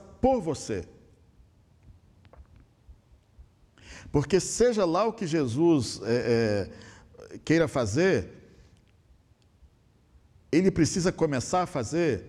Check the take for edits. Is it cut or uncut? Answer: uncut